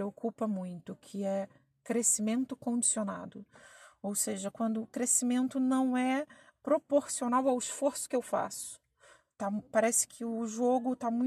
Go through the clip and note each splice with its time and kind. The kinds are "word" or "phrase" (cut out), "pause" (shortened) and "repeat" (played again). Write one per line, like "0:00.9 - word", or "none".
none